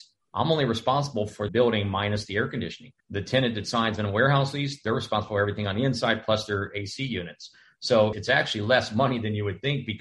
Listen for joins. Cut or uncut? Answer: cut